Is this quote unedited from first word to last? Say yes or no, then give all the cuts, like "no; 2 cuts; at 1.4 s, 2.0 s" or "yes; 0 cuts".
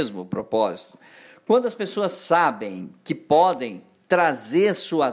yes; 0 cuts